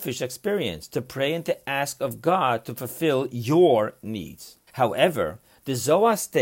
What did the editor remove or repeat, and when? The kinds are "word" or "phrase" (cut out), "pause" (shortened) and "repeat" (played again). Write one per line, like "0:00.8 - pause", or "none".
0:04.7 - pause